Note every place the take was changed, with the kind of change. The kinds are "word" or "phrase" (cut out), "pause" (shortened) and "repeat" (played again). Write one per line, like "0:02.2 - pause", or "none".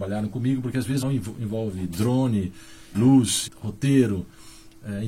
0:01.0 - phrase
0:02.9 - word
0:03.5 - word

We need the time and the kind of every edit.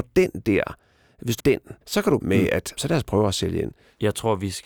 0:01.4 - phrase
0:01.8 - pause
0:02.2 - phrase
0:02.8 - word

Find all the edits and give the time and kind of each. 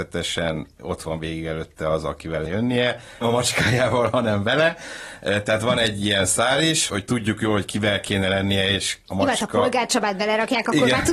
0:02.5 - phrase
0:03.2 - word
0:06.9 - word
0:09.0 - pause

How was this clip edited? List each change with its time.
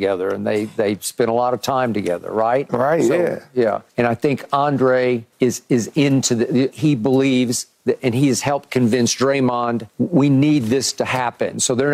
0:03.9 - pause
0:05.3 - pause
0:06.7 - word
0:08.0 - word
0:09.9 - pause

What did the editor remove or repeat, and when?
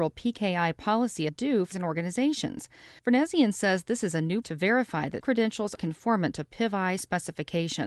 0:01.3 - word
0:01.7 - phrase
0:03.0 - pause
0:04.4 - word
0:05.2 - word
0:05.8 - word

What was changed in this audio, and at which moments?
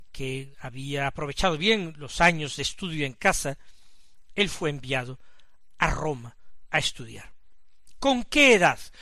none

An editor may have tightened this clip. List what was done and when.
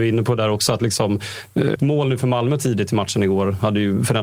0:01.8 - word

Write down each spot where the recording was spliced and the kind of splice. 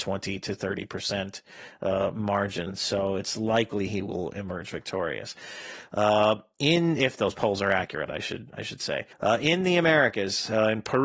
0:09.1 - pause

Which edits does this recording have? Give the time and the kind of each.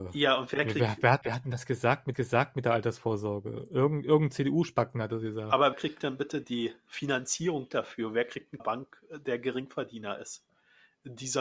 0:01.2 - word
0:02.1 - repeat
0:05.7 - word
0:06.4 - word
0:08.6 - phrase

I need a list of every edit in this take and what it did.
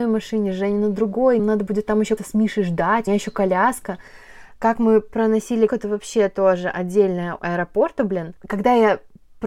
0:01.4 - word
0:02.2 - word
0:03.1 - word
0:05.7 - word
0:07.4 - phrase

